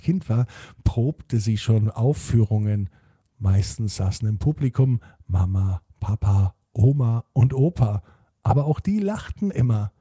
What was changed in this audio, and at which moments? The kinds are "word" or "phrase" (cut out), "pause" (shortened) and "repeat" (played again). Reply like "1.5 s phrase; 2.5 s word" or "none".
none